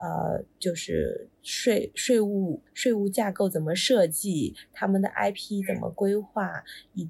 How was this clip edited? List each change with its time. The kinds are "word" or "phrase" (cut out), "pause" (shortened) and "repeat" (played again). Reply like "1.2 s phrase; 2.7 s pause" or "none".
2.7 s pause